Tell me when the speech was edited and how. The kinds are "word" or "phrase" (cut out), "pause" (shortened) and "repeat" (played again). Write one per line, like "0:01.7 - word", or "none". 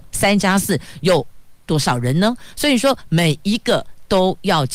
0:01.6 - pause